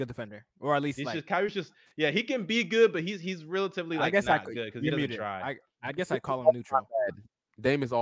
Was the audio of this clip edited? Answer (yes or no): no